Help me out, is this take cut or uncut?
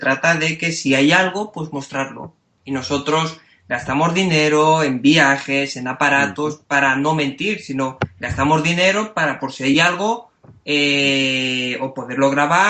uncut